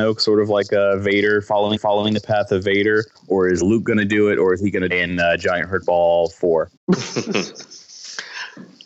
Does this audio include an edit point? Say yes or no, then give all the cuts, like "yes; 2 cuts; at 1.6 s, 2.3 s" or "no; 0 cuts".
yes; 5 cuts; at 1.8 s, 3.1 s, 3.6 s, 4.9 s, 6.8 s